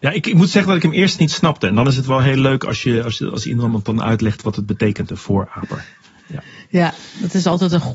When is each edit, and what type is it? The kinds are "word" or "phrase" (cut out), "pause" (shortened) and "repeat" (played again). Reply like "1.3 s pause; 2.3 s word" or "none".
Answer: none